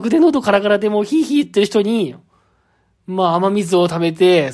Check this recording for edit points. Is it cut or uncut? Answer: uncut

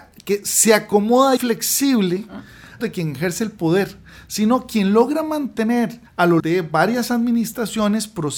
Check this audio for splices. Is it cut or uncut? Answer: cut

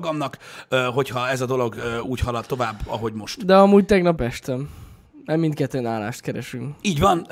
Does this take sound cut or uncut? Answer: cut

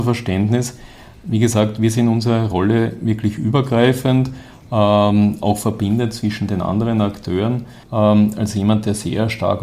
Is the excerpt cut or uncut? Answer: cut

